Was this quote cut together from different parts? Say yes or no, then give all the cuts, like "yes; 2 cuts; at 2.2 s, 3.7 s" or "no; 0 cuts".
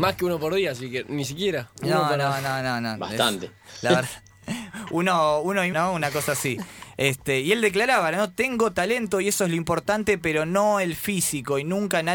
yes; 1 cut; at 5.7 s